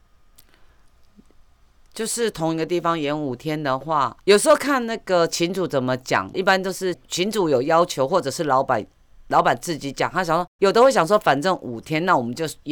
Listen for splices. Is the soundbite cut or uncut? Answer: cut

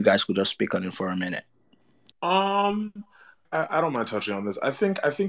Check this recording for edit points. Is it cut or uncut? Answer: cut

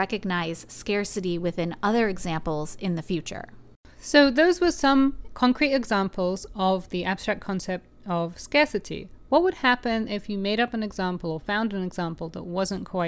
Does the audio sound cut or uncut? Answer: uncut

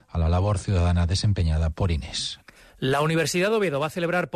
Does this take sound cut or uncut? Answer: uncut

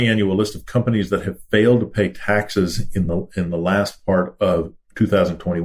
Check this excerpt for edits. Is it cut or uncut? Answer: uncut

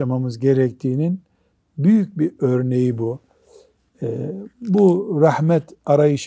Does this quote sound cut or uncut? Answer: uncut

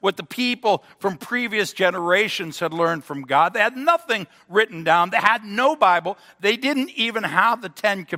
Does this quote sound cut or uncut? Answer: uncut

